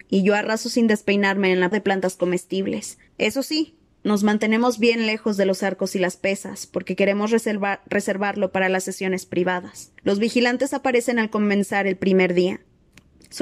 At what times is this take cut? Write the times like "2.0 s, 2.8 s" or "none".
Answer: 1.7 s, 3.1 s, 10.0 s